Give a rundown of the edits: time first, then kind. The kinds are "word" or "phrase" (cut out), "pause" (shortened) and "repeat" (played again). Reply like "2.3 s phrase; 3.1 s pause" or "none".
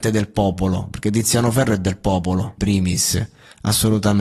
2.6 s word